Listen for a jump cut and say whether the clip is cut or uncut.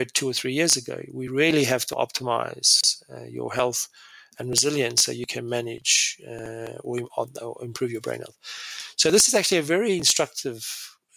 uncut